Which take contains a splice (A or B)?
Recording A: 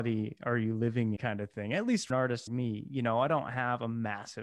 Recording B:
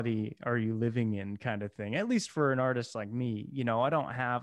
A